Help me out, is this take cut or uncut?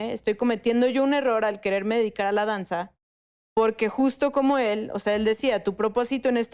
uncut